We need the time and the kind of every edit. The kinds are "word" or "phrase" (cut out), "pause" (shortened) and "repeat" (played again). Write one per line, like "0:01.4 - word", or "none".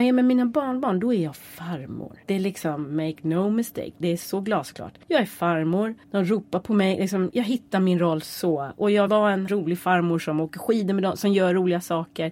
0:02.2 - pause
0:05.0 - pause
0:06.0 - pause
0:07.3 - word
0:09.1 - word
0:09.5 - word